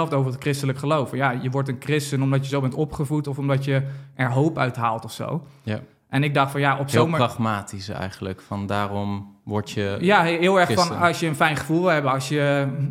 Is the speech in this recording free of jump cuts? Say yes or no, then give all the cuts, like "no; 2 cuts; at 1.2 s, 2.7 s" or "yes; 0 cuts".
yes; 0 cuts